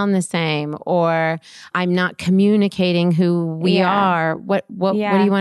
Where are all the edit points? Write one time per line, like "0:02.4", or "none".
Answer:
0:01.7

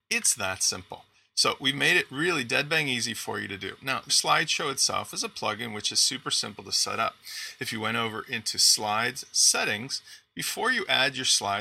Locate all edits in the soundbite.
0:04.1

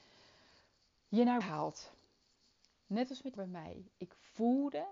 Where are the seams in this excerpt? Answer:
0:01.4
0:03.4

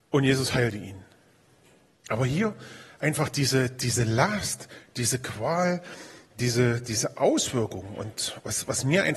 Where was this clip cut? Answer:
none

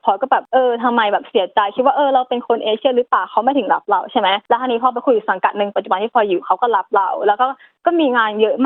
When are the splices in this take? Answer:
none

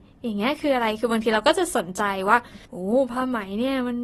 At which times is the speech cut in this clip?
0:02.7

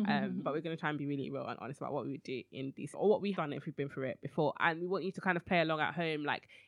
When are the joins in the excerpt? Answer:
0:02.9
0:03.3

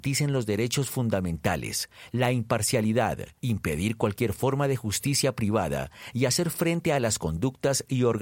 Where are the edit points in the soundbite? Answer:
0:03.4

